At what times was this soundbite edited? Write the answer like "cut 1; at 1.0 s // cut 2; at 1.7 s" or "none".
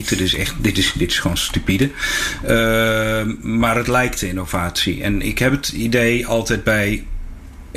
none

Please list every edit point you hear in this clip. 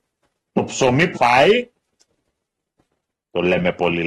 cut 1; at 1.1 s

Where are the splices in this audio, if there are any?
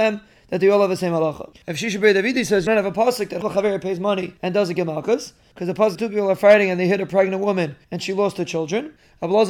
cut 1; at 2.7 s // cut 2; at 3.4 s // cut 3; at 4.4 s // cut 4; at 6.0 s // cut 5; at 7.8 s

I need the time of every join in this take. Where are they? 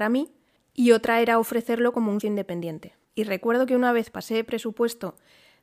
cut 1; at 2.2 s // cut 2; at 3.0 s

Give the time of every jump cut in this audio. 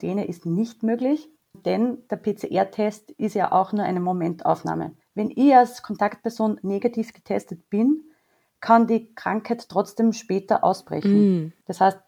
cut 1; at 5.0 s

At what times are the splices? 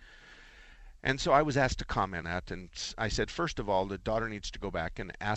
cut 1; at 2.2 s

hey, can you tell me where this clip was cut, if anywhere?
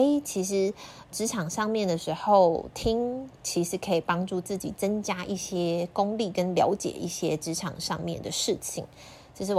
cut 1; at 1.1 s

